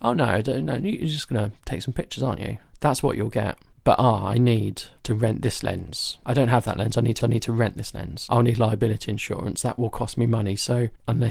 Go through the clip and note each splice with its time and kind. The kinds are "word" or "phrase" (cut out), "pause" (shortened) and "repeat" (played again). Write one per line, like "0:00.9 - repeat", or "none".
0:07.2 - repeat